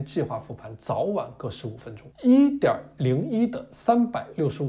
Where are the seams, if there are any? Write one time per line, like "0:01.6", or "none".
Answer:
0:02.1